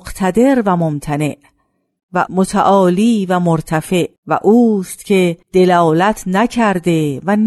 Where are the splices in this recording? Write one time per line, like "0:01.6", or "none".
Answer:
0:02.3
0:04.2
0:05.4